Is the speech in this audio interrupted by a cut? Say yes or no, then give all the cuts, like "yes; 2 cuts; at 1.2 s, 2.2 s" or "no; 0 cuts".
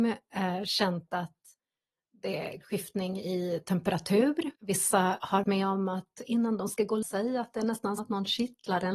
yes; 5 cuts; at 2.6 s, 4.6 s, 5.4 s, 7.0 s, 8.0 s